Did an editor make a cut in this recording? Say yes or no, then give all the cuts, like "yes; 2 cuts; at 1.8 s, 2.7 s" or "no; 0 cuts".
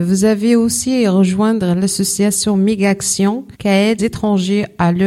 yes; 2 cuts; at 3.5 s, 4.0 s